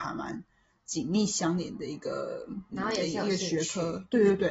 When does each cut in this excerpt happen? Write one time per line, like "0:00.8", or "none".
0:02.7